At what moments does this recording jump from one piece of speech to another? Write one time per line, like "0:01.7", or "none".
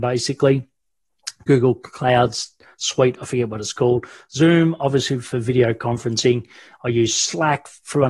none